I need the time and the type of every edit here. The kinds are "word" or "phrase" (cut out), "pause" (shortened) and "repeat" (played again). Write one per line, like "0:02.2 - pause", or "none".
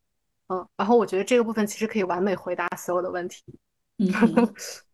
none